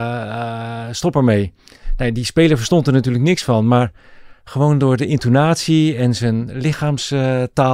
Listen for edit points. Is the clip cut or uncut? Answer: cut